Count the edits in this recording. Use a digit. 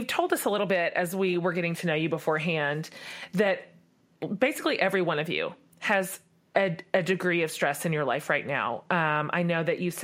0